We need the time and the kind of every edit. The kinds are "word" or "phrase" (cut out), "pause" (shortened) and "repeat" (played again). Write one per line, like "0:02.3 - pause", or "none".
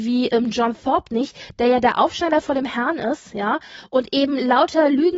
none